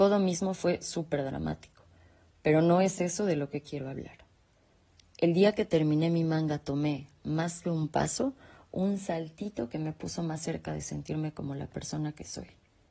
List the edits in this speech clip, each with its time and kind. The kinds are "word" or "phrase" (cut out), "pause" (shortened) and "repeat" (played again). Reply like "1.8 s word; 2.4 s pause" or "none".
none